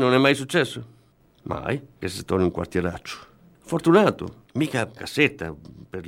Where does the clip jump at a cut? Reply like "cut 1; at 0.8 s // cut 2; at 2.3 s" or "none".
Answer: cut 1; at 2.0 s // cut 2; at 4.5 s // cut 3; at 5.0 s